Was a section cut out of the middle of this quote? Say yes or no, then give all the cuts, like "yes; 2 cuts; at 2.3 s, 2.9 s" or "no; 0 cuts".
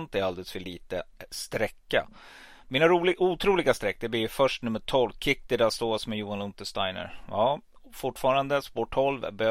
no; 0 cuts